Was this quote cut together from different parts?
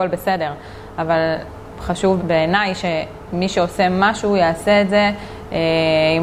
yes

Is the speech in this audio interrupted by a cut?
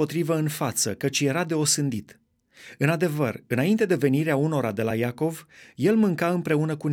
no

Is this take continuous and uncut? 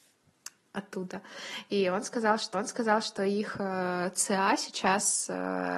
no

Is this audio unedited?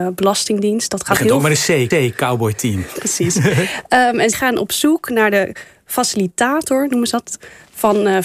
no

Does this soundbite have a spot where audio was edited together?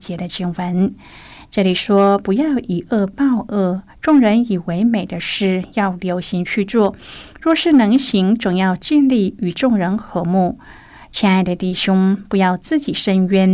no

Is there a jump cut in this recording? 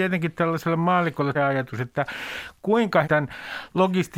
yes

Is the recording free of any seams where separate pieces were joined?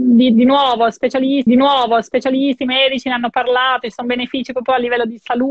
no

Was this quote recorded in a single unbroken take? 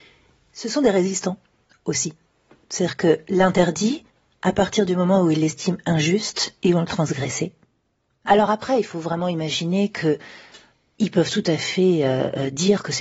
yes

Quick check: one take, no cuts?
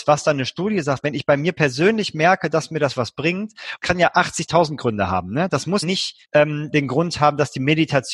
no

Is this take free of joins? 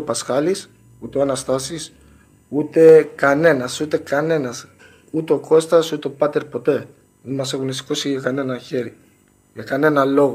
yes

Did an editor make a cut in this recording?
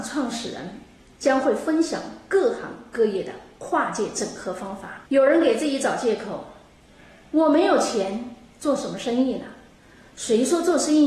yes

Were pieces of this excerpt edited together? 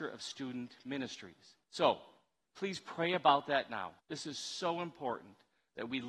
yes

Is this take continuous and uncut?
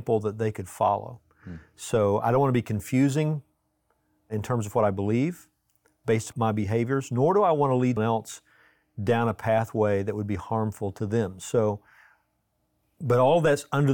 no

